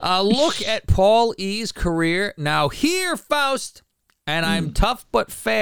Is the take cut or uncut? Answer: uncut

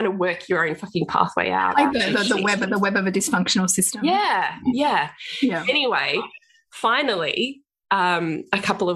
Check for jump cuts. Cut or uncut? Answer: uncut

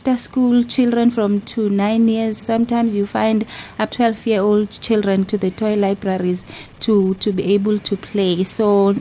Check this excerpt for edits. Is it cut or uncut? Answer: cut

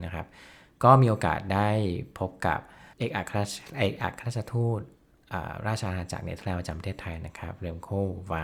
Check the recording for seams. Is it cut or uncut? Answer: cut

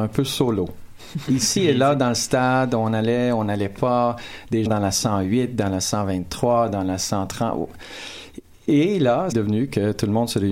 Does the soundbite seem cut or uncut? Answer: cut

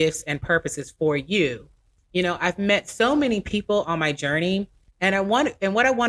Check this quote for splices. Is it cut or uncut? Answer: uncut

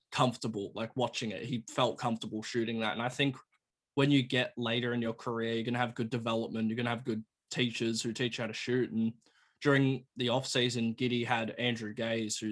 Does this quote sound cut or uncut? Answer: uncut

